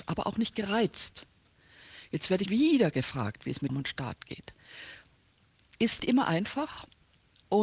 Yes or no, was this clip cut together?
yes